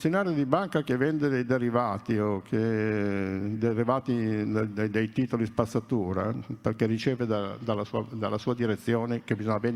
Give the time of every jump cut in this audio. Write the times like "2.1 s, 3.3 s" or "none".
none